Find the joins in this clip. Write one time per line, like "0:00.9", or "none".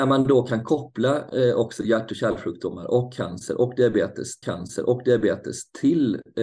0:04.4